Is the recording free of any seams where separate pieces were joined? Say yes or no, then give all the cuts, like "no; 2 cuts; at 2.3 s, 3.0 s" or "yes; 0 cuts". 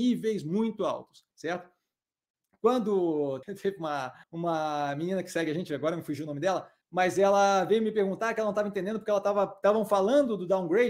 no; 4 cuts; at 1.3 s, 3.4 s, 4.2 s, 6.8 s